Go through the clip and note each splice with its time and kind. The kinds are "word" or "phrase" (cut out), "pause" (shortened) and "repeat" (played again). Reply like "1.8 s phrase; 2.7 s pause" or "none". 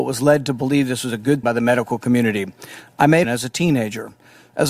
1.4 s word; 3.2 s phrase